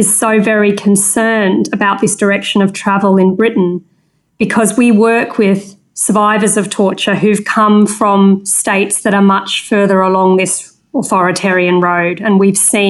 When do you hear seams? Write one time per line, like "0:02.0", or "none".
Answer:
none

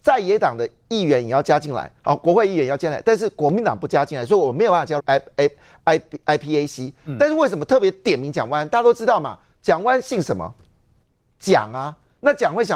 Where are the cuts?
0:02.0
0:05.0

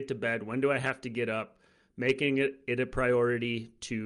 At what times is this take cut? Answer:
none

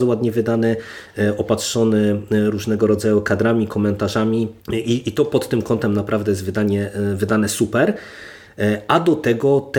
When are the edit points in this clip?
0:04.6

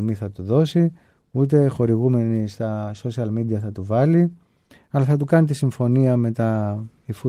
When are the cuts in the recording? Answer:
none

